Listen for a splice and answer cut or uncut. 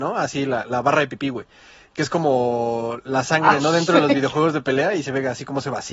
uncut